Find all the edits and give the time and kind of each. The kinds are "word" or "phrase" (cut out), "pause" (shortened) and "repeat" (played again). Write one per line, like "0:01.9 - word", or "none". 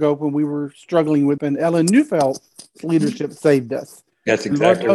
0:01.4 - word